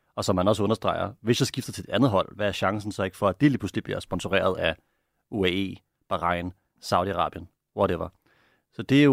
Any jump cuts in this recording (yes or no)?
no